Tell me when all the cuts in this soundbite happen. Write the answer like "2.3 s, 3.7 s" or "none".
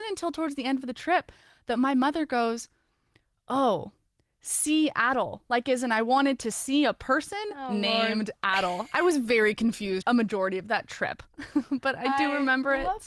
10.0 s, 11.3 s